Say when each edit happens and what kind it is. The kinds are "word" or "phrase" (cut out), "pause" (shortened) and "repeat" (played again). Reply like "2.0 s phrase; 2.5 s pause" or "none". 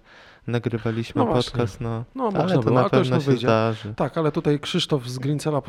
none